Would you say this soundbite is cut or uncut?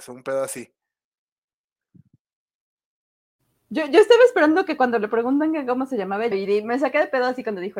cut